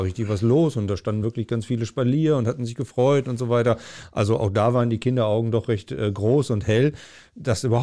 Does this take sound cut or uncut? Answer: uncut